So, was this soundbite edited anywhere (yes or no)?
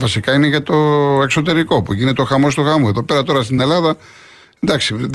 no